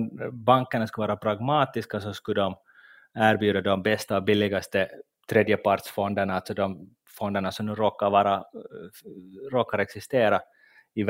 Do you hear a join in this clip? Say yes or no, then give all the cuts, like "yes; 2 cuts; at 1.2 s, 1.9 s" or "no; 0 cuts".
no; 0 cuts